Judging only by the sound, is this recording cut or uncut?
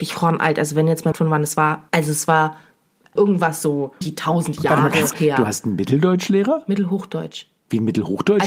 cut